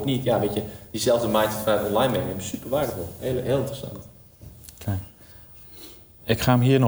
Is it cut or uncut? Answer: uncut